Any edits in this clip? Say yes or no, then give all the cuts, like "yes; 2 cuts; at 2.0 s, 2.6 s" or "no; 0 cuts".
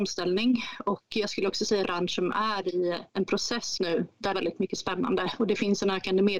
yes; 4 cuts; at 1.8 s, 3.1 s, 3.8 s, 4.3 s